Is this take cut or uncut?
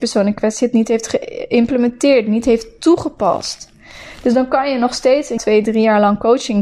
cut